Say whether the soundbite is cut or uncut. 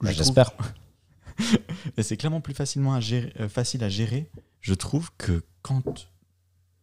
uncut